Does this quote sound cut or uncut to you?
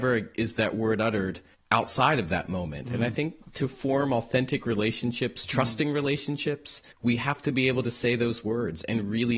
cut